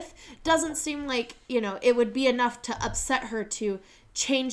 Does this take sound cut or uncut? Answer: uncut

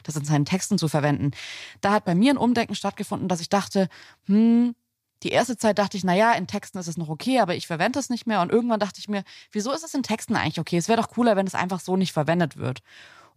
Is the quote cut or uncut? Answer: uncut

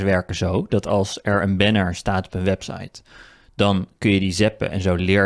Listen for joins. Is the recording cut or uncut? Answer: uncut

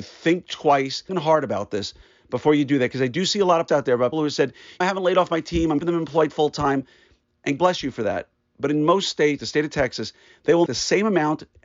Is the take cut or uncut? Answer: cut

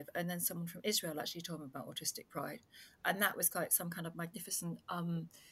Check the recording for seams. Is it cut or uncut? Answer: uncut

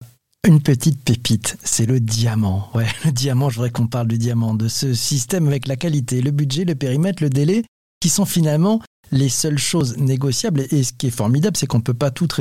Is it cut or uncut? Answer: uncut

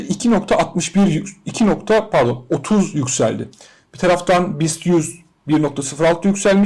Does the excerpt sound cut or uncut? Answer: uncut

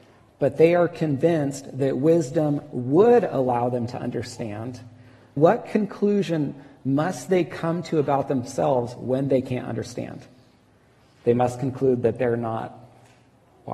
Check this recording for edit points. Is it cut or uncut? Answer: cut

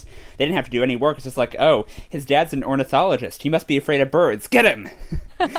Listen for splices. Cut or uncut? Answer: uncut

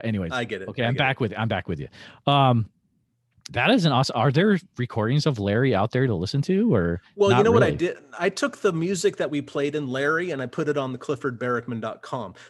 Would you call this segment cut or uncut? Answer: uncut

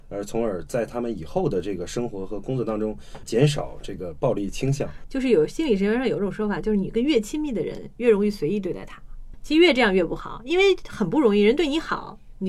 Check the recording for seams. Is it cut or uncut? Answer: cut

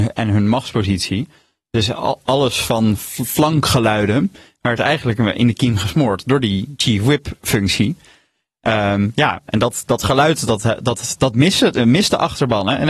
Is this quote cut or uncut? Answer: uncut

